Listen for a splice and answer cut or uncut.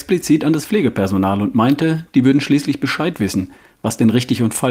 uncut